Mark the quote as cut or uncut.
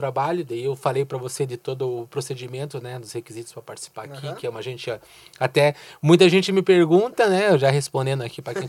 uncut